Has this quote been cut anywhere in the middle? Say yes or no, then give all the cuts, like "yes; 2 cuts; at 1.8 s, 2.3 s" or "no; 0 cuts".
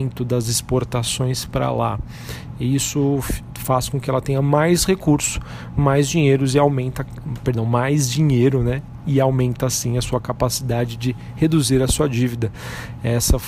no; 0 cuts